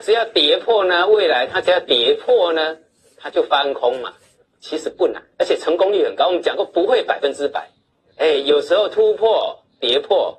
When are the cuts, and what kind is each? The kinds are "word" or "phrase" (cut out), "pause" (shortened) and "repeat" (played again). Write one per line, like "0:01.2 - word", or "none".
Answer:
0:05.3 - pause